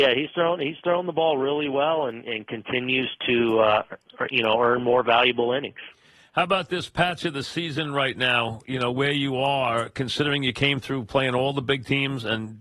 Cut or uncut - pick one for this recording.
uncut